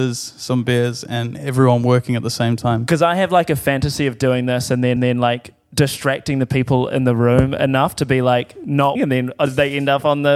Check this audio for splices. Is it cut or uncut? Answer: cut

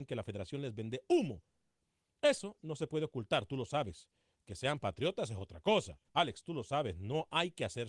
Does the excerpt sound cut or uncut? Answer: cut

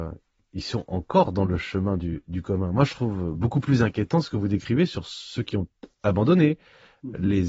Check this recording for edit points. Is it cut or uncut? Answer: uncut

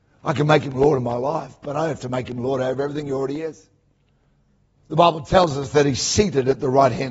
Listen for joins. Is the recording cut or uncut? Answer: uncut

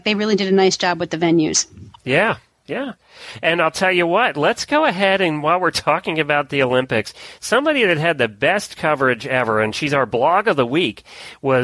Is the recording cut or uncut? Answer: uncut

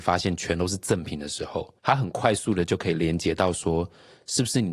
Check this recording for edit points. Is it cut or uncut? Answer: cut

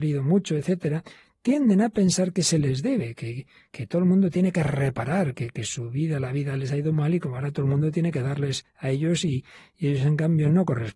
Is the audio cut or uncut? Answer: uncut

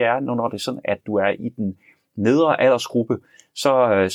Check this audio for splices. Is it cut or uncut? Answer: uncut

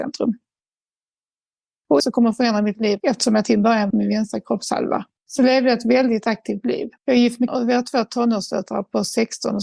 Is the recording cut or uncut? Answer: cut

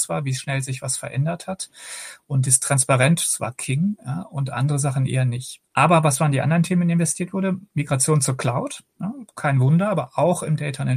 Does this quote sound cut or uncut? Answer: cut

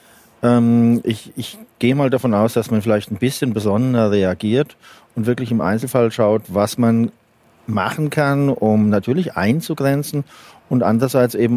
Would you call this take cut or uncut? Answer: uncut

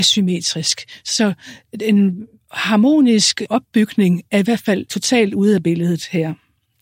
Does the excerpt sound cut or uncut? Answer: cut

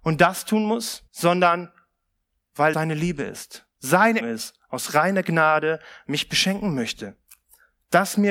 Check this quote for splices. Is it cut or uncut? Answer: cut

